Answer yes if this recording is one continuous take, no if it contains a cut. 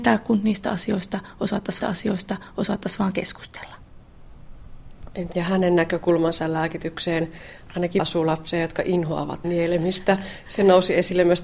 no